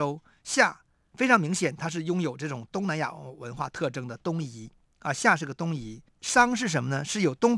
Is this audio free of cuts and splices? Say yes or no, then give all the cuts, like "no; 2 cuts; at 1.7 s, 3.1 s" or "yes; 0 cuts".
no; 2 cuts; at 4.9 s, 6.1 s